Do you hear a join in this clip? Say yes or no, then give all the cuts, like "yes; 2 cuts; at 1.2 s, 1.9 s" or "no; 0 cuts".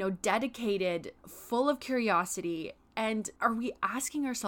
yes; 2 cuts; at 1.2 s, 3.4 s